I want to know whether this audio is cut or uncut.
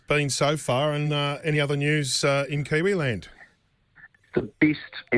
uncut